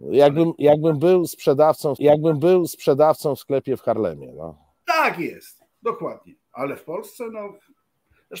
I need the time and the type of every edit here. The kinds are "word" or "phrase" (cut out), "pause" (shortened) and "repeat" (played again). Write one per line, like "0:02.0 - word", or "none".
0:02.0 - repeat
0:06.4 - pause